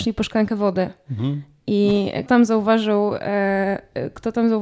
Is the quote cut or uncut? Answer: cut